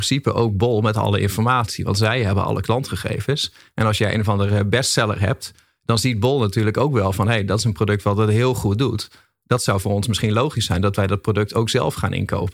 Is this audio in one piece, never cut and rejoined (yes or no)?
yes